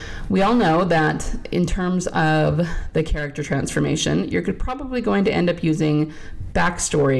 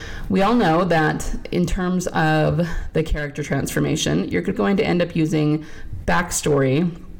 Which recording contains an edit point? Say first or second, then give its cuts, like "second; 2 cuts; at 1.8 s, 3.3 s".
second; 1 cut; at 4.5 s